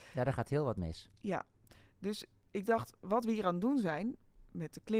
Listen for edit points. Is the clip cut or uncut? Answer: uncut